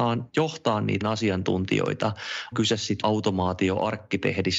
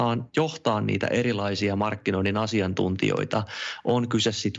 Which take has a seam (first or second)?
first